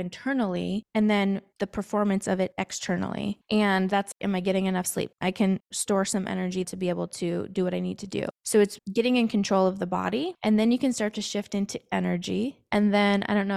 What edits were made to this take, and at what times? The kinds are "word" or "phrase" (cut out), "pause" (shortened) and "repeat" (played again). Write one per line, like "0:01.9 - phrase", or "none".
0:06.6 - word